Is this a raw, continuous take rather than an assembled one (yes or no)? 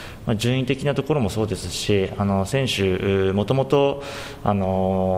yes